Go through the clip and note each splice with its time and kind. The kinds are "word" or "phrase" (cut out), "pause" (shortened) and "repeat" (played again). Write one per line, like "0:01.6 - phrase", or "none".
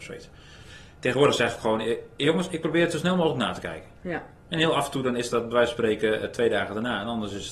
none